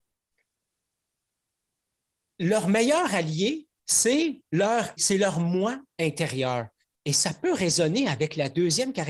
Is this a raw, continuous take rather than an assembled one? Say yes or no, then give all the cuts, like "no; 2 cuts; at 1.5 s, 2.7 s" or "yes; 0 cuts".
no; 2 cuts; at 5.0 s, 6.8 s